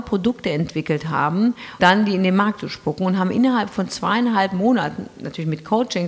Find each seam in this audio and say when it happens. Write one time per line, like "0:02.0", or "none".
0:01.8